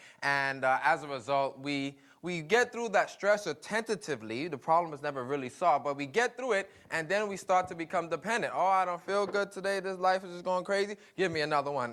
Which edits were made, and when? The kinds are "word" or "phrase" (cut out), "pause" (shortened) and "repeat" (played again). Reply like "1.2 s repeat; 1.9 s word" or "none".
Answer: none